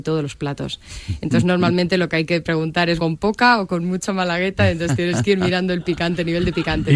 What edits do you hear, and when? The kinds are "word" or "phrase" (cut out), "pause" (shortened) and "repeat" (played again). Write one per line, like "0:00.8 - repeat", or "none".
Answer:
0:03.0 - word